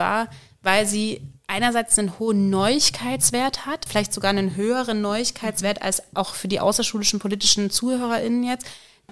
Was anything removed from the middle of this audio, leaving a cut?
yes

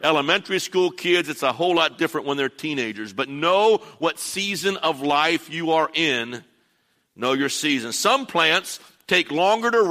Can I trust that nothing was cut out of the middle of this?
yes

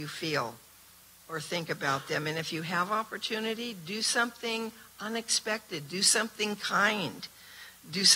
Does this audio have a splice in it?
no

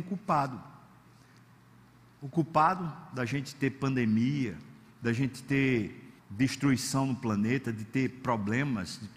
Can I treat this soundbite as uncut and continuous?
no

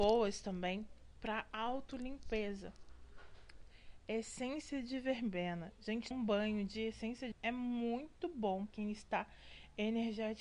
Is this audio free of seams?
no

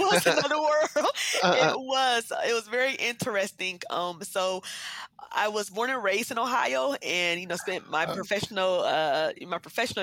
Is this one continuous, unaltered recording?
yes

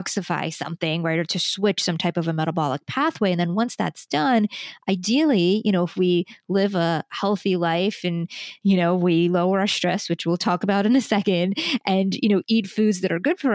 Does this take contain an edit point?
no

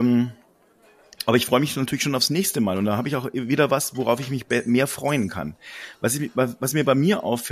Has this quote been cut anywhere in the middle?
no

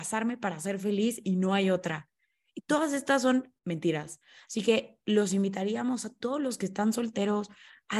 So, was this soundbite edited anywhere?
yes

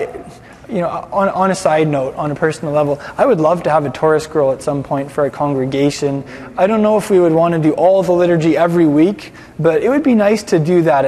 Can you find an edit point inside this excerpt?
no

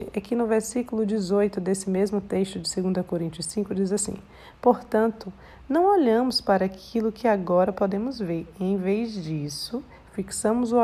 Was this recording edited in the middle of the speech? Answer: no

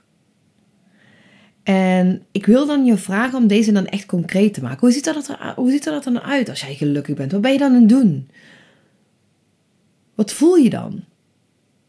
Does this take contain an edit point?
no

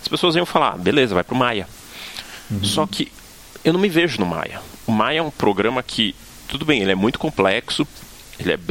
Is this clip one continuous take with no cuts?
yes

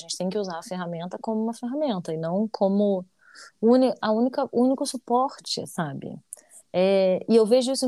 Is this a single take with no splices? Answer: no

